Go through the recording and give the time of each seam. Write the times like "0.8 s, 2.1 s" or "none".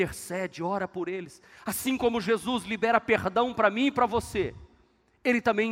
none